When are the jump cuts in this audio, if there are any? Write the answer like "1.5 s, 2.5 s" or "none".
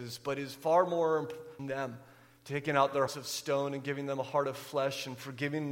1.6 s, 3.1 s